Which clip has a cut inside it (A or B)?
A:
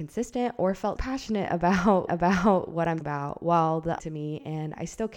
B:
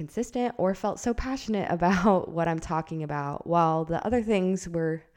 A